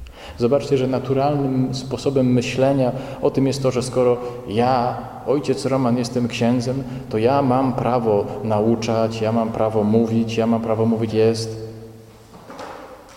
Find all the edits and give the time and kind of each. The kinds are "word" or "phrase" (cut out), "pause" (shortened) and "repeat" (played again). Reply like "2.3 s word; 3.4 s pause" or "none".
11.1 s word

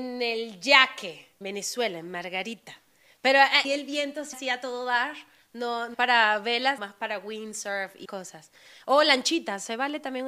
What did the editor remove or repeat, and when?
1.4 s word; 3.6 s word; 4.3 s word; 5.9 s word; 6.8 s word; 8.0 s word

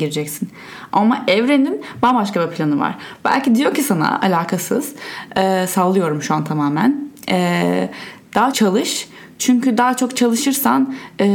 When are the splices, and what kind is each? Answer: 8.5 s word

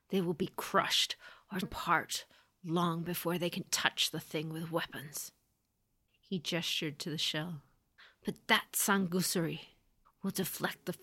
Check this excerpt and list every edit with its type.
1.6 s word; 3.7 s word

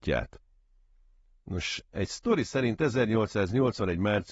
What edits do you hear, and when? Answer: none

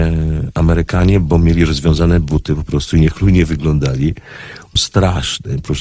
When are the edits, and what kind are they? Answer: 4.8 s word

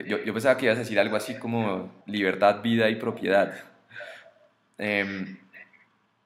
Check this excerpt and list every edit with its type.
2.0 s pause

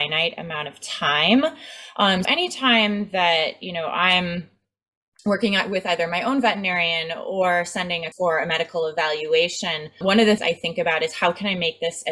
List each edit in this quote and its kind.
2.2 s word; 8.1 s word; 10.0 s word; 10.4 s word

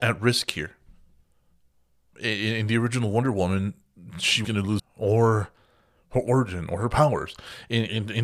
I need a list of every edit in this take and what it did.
2.1 s word; 4.4 s word; 4.8 s word

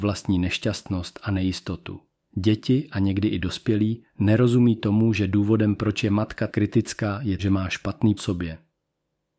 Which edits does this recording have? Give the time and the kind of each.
2.2 s pause; 4.1 s pause; 6.5 s word; 7.4 s word; 8.2 s phrase

